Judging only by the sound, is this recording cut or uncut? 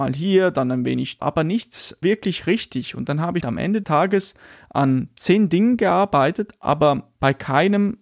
cut